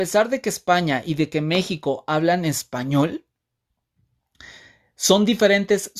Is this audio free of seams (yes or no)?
yes